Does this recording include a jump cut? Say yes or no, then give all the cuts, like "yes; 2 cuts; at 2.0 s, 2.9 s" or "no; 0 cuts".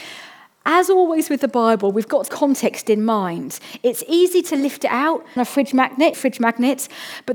yes; 3 cuts; at 2.3 s, 5.4 s, 6.1 s